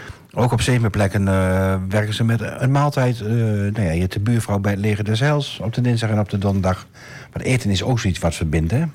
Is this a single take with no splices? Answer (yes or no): yes